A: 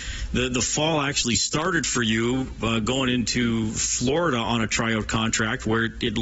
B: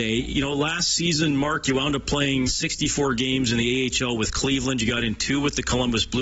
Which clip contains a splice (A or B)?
B